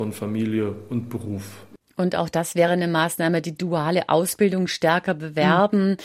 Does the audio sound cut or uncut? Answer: uncut